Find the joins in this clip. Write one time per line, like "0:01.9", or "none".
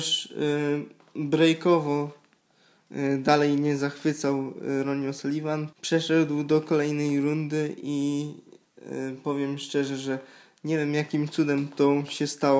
0:05.7